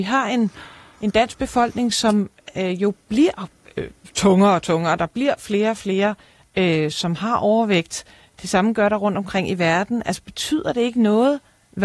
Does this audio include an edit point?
no; 0 cuts

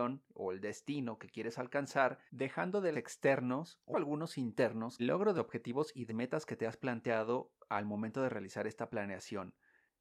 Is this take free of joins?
no; 6 cuts; at 2.3 s, 2.9 s, 3.9 s, 5.0 s, 5.4 s, 6.1 s

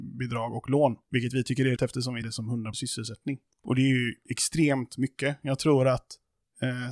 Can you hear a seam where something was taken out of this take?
yes; 3 cuts; at 1.8 s, 2.2 s, 2.7 s

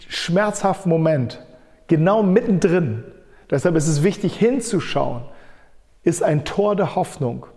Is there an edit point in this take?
no; 0 cuts

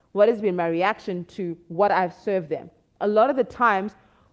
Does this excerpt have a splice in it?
no; 0 cuts

